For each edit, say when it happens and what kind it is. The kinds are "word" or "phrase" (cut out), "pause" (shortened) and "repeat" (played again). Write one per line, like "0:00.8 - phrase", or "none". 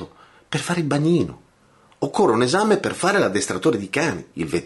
none